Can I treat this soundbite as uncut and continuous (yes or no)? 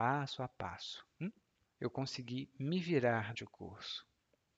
no